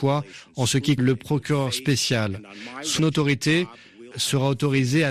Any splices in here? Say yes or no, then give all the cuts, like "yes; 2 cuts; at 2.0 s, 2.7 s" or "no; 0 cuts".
yes; 3 cuts; at 1.0 s, 3.0 s, 4.1 s